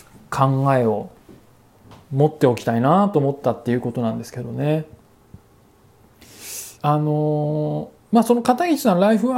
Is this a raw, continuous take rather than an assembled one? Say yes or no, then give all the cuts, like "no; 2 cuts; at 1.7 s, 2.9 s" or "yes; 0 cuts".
no; 2 cuts; at 2.0 s, 6.8 s